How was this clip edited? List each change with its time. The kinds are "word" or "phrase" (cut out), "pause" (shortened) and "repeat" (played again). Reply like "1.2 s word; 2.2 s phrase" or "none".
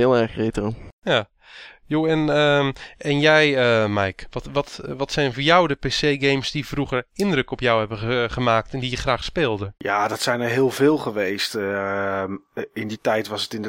9.8 s pause